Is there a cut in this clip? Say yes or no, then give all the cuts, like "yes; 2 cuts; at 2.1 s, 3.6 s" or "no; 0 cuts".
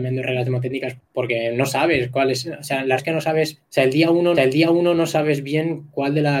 yes; 4 cuts; at 1.0 s, 3.0 s, 3.7 s, 4.3 s